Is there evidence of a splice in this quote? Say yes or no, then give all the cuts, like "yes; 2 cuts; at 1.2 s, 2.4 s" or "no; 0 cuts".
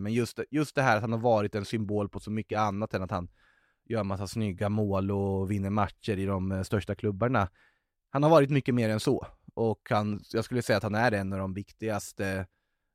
no; 0 cuts